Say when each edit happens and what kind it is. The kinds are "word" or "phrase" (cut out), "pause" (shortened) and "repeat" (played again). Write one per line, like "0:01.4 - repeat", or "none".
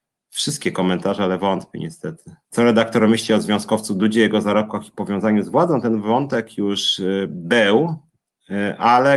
0:02.4 - pause